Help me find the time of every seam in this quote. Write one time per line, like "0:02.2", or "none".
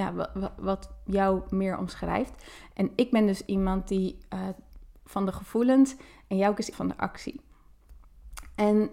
0:06.7